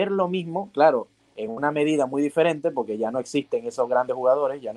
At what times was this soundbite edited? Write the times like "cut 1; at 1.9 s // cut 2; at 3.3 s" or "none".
none